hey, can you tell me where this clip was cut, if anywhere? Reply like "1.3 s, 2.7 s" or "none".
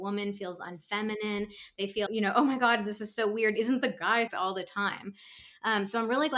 2.1 s, 4.3 s